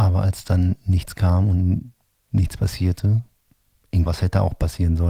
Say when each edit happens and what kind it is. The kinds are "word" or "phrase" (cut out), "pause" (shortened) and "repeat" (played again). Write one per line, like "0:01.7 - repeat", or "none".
0:04.1 - word